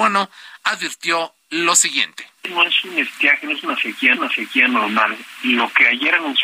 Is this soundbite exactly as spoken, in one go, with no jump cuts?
no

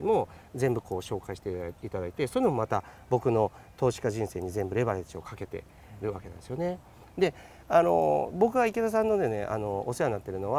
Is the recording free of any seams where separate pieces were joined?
yes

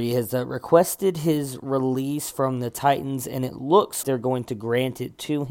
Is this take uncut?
no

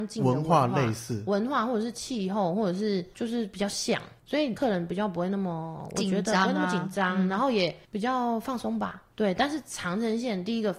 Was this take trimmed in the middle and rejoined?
yes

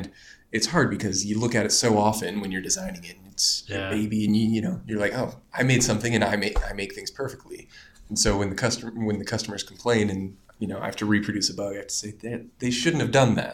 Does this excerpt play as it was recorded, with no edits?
yes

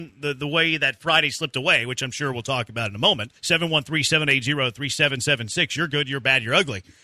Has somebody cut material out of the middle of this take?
yes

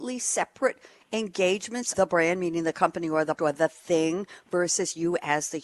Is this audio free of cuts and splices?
no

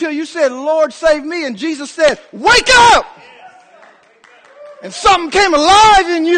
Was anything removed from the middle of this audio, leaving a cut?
no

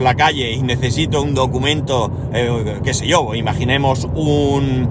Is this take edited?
no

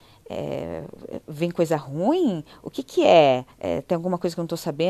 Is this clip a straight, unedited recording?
no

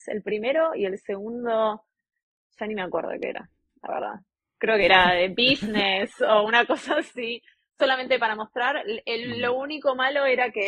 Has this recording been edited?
no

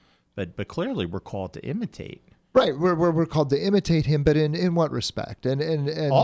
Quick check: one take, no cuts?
yes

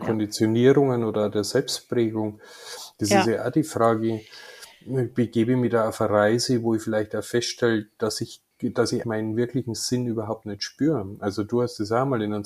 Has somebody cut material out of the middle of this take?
yes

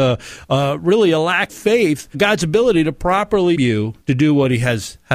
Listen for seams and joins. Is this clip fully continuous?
no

